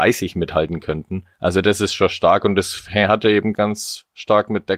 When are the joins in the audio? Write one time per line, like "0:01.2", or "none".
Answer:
0:01.3
0:03.5